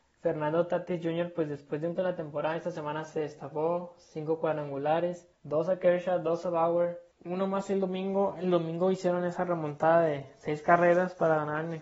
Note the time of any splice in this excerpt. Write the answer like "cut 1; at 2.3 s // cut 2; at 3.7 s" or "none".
cut 1; at 2.0 s // cut 2; at 5.3 s // cut 3; at 7.1 s